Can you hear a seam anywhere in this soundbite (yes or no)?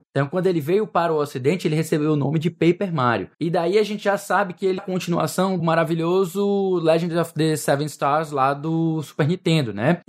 yes